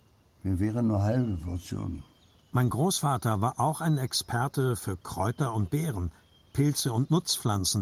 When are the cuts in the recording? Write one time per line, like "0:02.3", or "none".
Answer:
none